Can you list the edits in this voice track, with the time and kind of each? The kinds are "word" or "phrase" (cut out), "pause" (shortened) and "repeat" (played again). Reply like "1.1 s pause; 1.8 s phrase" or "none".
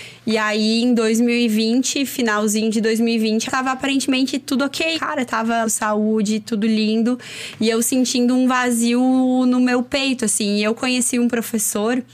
3.5 s phrase; 4.9 s word; 5.6 s phrase